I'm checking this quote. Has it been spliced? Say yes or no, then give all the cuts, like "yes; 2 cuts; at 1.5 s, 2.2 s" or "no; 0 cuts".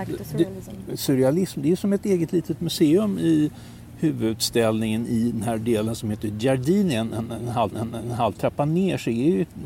yes; 1 cut; at 7.7 s